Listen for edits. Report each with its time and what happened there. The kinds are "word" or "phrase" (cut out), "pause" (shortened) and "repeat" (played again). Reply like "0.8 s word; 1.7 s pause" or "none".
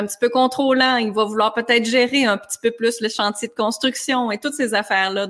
none